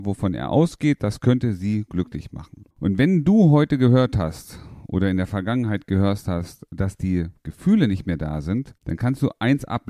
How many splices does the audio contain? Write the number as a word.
two